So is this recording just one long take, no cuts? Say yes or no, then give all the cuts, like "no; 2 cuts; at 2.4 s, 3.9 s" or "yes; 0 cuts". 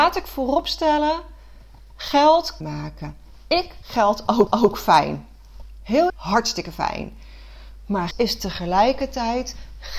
no; 5 cuts; at 2.6 s, 3.8 s, 4.5 s, 6.1 s, 8.1 s